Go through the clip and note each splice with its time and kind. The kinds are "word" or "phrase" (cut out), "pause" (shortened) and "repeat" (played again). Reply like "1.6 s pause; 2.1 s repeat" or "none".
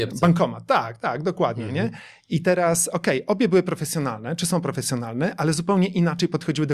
none